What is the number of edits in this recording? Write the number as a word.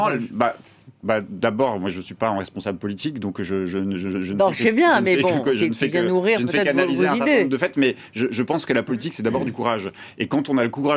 one